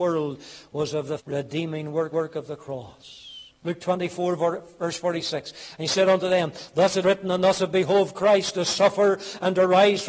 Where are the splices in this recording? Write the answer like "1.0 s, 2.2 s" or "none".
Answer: 1.2 s, 2.1 s, 3.6 s, 7.0 s